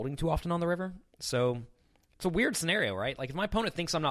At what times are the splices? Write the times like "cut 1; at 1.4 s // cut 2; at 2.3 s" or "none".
none